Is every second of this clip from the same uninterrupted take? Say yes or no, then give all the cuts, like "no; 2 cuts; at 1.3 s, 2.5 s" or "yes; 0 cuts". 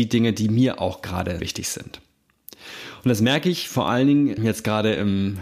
no; 2 cuts; at 1.4 s, 4.4 s